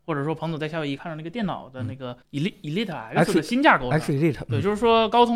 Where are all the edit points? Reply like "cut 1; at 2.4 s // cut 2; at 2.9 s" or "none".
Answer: cut 1; at 2.2 s